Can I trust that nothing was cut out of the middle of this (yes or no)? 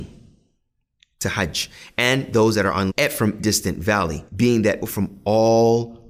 no